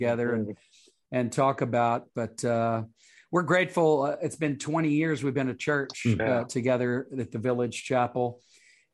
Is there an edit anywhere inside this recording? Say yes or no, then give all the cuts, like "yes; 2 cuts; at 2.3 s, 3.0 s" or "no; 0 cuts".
no; 0 cuts